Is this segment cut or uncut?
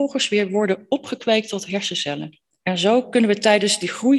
cut